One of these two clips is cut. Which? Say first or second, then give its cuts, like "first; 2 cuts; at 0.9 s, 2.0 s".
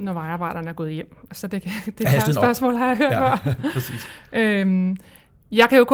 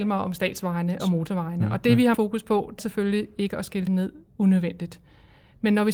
second; 4 cuts; at 1.0 s, 2.1 s, 2.8 s, 3.9 s